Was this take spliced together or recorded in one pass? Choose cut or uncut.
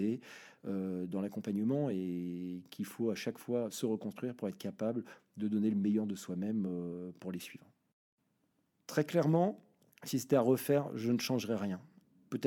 uncut